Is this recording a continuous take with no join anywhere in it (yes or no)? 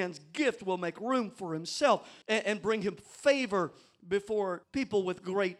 no